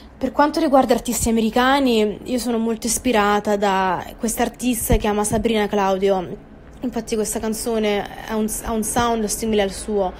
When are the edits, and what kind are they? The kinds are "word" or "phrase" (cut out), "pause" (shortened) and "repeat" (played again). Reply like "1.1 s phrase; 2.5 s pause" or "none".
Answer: 5.0 s word